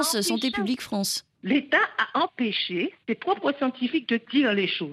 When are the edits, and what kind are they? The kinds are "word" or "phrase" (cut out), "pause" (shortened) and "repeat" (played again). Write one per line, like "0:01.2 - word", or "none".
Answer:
0:01.3 - pause
0:03.0 - pause